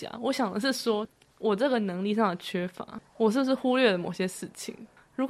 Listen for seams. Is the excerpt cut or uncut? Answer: uncut